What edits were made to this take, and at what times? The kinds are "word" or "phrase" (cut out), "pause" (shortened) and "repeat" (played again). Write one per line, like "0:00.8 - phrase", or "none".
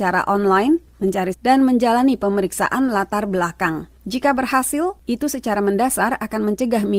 0:01.3 - word
0:04.0 - pause